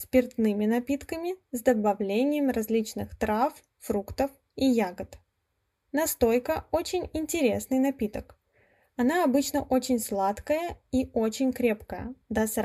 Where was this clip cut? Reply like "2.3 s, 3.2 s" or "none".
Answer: none

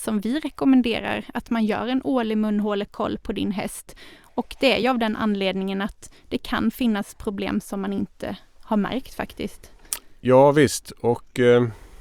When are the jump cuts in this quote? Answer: none

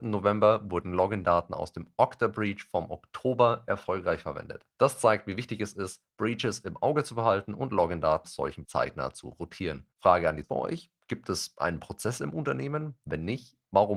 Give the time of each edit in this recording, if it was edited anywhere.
4.7 s, 8.2 s, 8.6 s, 9.9 s, 10.4 s

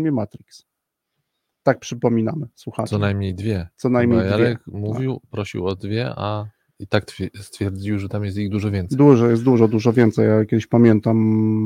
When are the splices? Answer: none

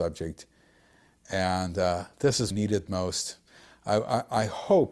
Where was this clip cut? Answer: 2.5 s

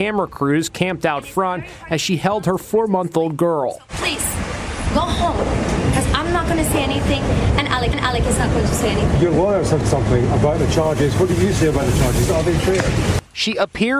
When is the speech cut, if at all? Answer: 7.9 s, 9.8 s

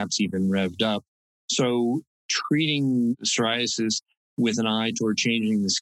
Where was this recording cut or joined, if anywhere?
none

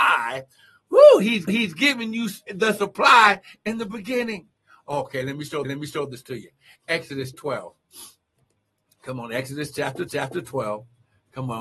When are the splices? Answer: 1.5 s, 2.5 s, 5.6 s, 7.3 s, 10.1 s

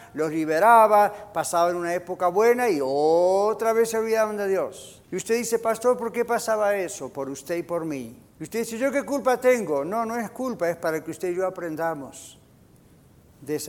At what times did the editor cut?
5.0 s, 8.3 s

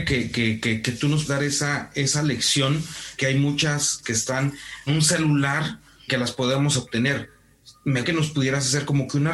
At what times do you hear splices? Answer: 1.3 s, 3.2 s, 4.0 s, 4.9 s, 6.1 s, 8.0 s

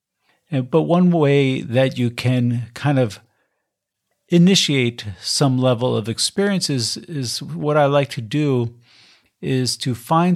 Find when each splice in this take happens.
none

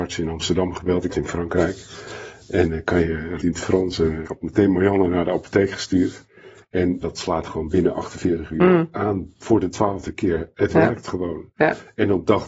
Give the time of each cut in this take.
1.1 s, 3.4 s, 4.2 s, 7.0 s

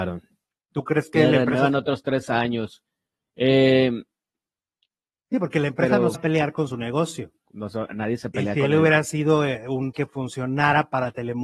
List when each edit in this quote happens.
6.1 s, 9.9 s

